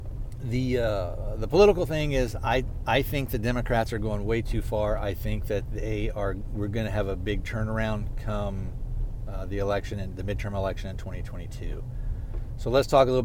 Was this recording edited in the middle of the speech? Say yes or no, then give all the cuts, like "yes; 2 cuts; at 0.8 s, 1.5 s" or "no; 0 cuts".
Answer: no; 0 cuts